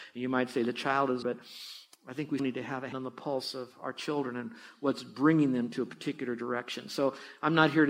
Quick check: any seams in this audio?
yes; 3 cuts; at 1.2 s, 2.4 s, 2.9 s

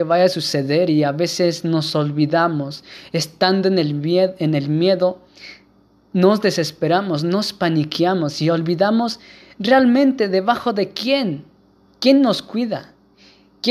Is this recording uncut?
yes; 0 cuts

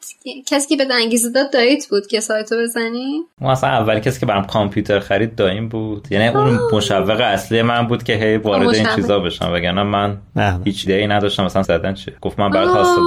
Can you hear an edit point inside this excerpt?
yes; 3 cuts; at 10.9 s, 11.6 s, 12.2 s

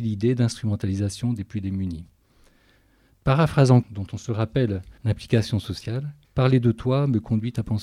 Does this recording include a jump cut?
yes; 3 cuts; at 3.8 s, 5.0 s, 6.2 s

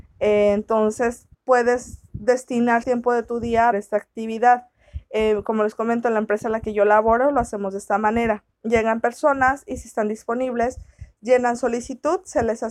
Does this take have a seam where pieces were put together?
yes; 4 cuts; at 1.3 s, 2.8 s, 3.7 s, 8.5 s

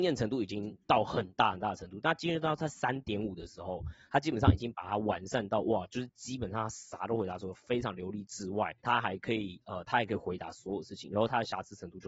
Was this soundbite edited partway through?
yes; 1 cut; at 8.8 s

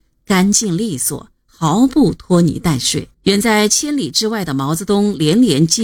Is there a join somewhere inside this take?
yes; 1 cut; at 3.1 s

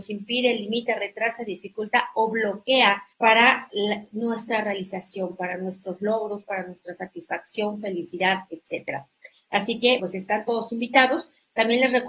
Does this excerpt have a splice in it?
yes; 2 cuts; at 3.1 s, 10.0 s

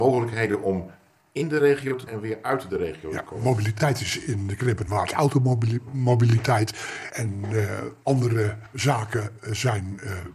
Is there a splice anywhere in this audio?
yes; 1 cut; at 2.1 s

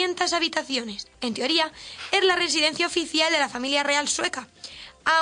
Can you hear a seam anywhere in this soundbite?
yes; 1 cut; at 1.1 s

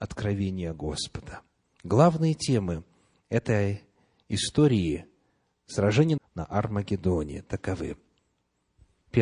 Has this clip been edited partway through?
yes; 1 cut; at 6.2 s

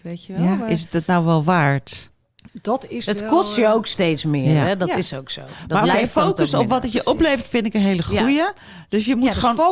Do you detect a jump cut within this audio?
no; 0 cuts

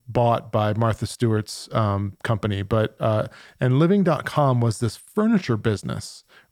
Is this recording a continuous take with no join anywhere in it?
yes; 0 cuts

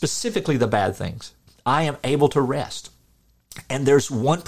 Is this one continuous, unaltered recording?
yes; 0 cuts

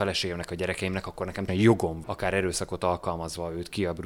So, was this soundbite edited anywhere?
yes; 2 cuts; at 1.5 s, 2.0 s

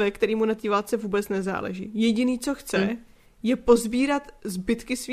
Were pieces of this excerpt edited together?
no; 0 cuts

